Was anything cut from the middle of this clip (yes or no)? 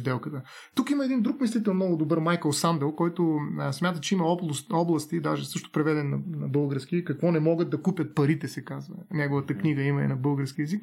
no